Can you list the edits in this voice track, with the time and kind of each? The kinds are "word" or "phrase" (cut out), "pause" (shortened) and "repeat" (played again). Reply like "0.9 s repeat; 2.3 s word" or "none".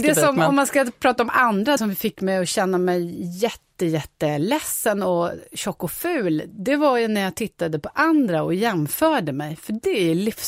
1.8 s word